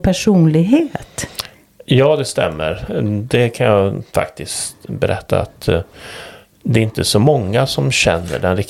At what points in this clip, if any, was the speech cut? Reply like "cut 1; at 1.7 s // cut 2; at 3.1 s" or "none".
none